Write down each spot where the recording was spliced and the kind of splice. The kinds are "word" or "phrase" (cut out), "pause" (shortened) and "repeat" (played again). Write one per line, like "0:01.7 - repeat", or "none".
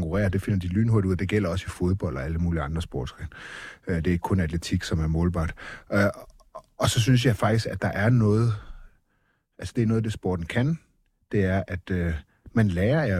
none